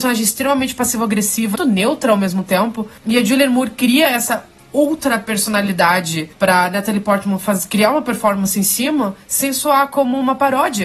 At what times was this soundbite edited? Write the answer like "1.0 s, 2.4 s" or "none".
1.6 s, 3.0 s, 6.3 s, 9.2 s